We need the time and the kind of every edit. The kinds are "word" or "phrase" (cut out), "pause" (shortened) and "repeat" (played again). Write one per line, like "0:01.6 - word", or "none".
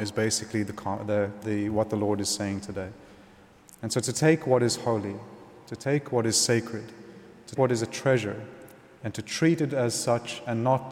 0:01.4 - word
0:07.6 - word